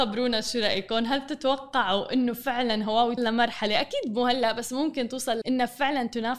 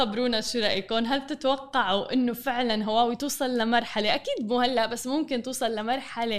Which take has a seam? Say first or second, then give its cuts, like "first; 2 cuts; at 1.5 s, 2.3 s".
first; 2 cuts; at 3.2 s, 5.4 s